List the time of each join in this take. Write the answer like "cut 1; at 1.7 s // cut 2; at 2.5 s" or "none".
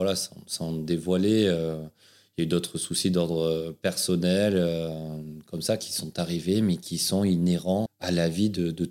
cut 1; at 7.9 s